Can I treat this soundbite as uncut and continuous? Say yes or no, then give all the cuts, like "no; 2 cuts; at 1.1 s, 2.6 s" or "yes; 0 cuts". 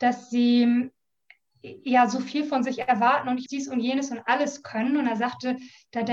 no; 1 cut; at 3.5 s